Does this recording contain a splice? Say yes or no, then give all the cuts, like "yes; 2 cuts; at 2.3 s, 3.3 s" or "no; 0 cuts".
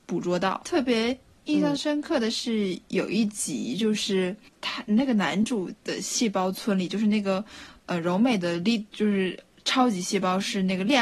no; 0 cuts